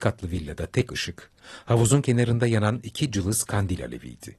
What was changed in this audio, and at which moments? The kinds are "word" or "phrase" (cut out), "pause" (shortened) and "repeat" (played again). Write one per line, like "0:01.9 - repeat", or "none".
none